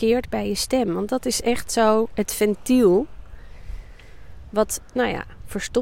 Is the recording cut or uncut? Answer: uncut